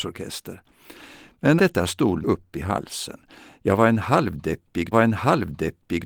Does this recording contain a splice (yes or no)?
yes